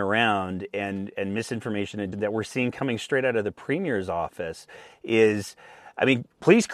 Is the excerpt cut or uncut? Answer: cut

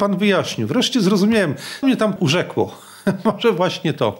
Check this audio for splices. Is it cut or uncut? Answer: cut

